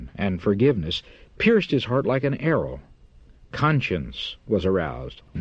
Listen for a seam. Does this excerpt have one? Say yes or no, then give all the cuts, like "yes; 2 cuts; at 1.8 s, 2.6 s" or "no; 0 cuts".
no; 0 cuts